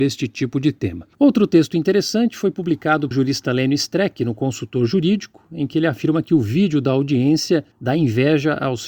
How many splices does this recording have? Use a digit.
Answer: 3